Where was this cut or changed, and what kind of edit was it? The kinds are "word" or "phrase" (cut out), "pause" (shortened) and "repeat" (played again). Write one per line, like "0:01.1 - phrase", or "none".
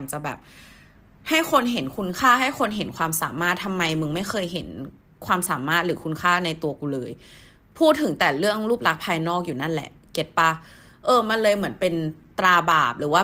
none